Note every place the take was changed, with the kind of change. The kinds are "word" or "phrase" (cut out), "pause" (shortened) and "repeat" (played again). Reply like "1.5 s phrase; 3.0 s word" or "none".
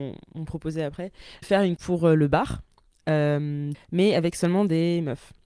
1.4 s word; 1.8 s word; 3.7 s word